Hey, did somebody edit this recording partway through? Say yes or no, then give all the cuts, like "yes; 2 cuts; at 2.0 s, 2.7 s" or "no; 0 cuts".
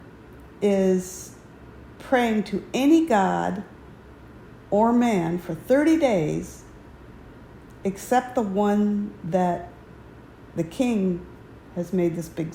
no; 0 cuts